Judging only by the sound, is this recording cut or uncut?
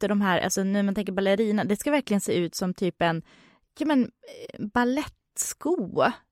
uncut